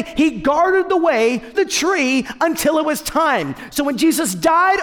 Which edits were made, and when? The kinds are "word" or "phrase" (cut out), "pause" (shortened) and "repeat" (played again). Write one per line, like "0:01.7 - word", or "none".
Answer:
0:01.5 - word